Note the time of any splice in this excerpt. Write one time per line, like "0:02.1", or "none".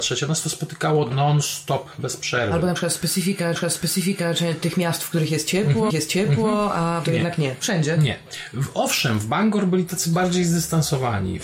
0:03.5
0:05.9
0:07.0